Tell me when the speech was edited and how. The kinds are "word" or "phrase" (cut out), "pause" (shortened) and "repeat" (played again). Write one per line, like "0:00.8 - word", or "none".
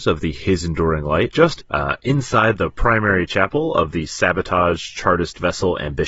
0:01.3 - word
0:01.6 - phrase